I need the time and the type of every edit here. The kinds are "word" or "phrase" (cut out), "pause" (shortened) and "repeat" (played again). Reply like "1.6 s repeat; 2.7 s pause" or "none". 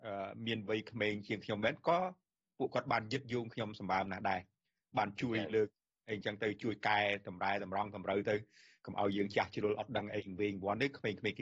none